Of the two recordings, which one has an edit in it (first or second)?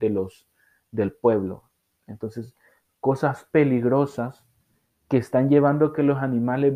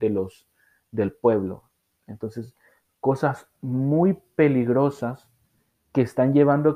first